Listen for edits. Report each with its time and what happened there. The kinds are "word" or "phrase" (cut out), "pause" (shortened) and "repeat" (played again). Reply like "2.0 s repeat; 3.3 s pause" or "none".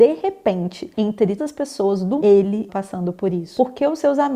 1.4 s word; 2.2 s word; 2.7 s word